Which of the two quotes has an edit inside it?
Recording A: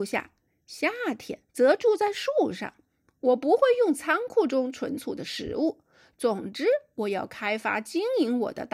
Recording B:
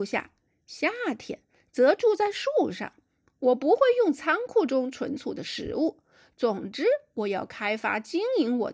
A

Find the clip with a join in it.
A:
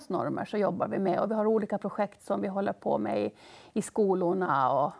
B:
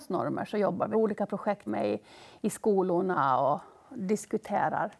B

